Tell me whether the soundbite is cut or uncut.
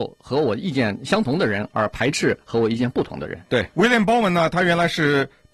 cut